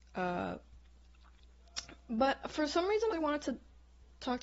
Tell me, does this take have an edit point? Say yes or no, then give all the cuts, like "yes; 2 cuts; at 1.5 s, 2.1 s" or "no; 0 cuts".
yes; 1 cut; at 3.1 s